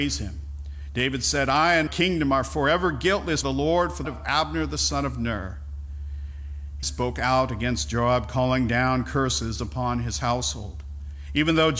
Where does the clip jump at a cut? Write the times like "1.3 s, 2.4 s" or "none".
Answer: 1.9 s, 3.4 s, 4.0 s, 6.8 s